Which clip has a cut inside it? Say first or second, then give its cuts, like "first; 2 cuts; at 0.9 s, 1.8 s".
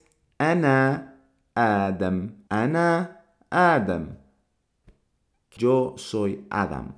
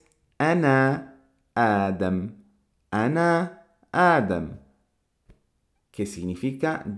first; 2 cuts; at 2.5 s, 5.6 s